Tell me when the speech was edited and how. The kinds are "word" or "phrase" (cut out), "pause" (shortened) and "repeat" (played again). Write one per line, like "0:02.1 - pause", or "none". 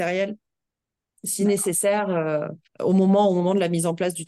0:02.7 - pause